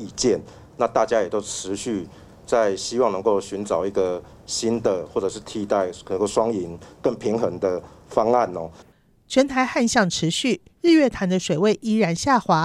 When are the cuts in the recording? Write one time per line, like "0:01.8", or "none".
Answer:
none